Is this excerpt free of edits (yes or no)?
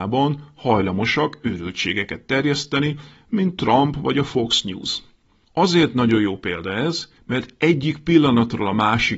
yes